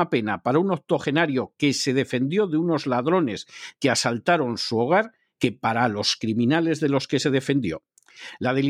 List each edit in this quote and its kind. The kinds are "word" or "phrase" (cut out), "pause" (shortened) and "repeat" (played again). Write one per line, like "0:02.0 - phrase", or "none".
none